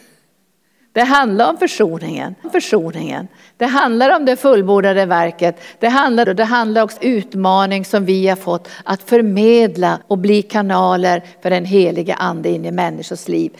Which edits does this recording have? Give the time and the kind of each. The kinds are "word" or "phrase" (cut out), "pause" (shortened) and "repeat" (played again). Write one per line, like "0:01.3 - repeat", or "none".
0:02.4 - repeat
0:06.2 - phrase
0:07.0 - phrase
0:10.0 - pause

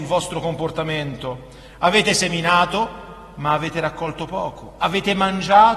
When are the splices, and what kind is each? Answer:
none

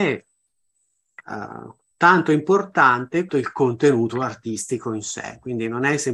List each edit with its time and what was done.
0:01.9 - pause
0:03.3 - word

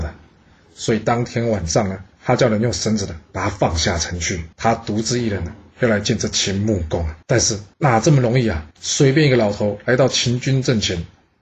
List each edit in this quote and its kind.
0:02.1 - pause
0:04.5 - pause
0:07.2 - pause
0:07.7 - pause
0:08.7 - pause

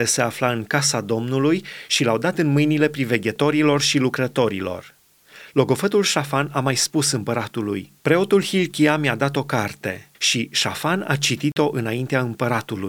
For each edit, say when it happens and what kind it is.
0:08.0 - pause
0:10.1 - pause

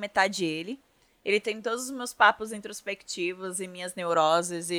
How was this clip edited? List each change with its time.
none

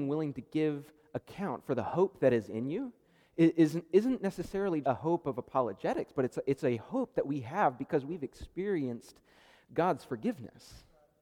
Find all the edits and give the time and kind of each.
0:04.8 - word

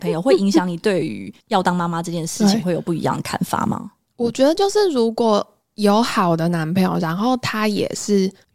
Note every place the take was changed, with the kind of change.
none

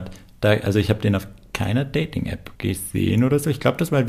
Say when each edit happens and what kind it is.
0:02.5 - pause

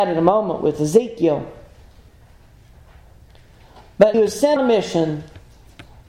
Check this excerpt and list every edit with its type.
0:04.1 - word
0:04.6 - word

